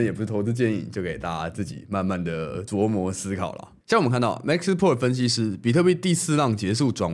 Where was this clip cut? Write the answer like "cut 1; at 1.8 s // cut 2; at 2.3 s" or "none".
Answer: none